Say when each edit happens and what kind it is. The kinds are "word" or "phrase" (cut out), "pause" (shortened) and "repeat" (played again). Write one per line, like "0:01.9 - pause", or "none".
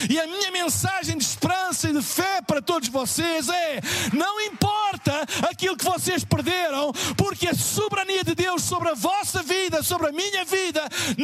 none